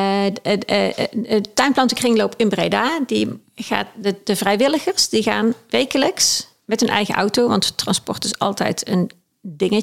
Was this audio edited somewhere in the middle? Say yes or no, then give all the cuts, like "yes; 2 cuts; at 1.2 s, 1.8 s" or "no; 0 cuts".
yes; 1 cut; at 6.6 s